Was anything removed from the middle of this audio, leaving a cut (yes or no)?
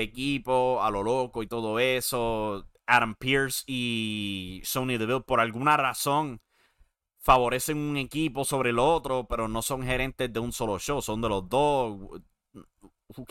no